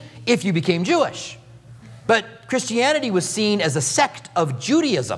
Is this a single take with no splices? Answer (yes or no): yes